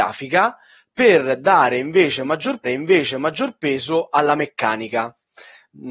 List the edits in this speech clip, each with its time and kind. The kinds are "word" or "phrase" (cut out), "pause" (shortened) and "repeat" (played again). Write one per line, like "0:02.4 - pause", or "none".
0:02.6 - repeat